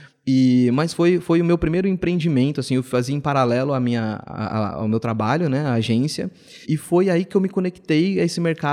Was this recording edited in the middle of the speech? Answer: yes; 1 cut; at 6.6 s

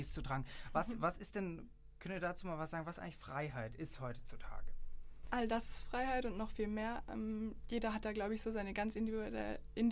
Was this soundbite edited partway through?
no; 0 cuts

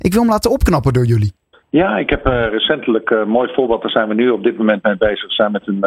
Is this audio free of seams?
no; 1 cut; at 1.5 s

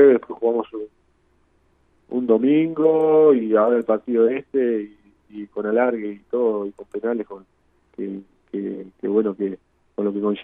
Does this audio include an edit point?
no; 0 cuts

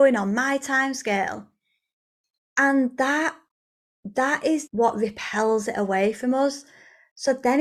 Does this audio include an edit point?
yes; 1 cut; at 4.7 s

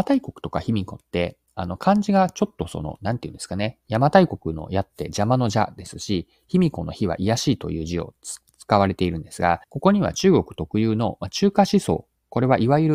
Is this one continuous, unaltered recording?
no; 1 cut; at 9.6 s

